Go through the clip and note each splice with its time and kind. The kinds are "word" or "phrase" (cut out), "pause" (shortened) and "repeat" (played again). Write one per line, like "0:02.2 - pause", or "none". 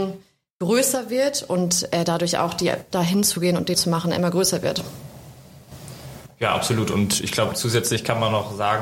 0:02.9 - word
0:03.7 - word